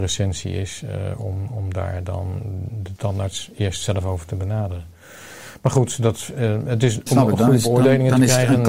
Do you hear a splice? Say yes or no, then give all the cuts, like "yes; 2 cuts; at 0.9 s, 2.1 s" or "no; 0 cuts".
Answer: yes; 1 cut; at 7.1 s